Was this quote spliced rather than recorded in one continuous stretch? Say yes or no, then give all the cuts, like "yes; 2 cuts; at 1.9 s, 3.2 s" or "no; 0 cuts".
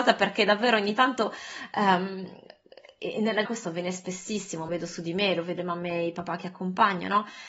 yes; 3 cuts; at 3.5 s, 4.7 s, 5.6 s